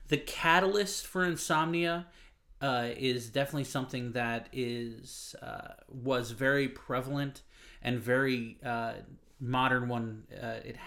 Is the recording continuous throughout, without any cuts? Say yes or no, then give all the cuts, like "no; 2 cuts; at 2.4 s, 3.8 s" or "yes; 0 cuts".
yes; 0 cuts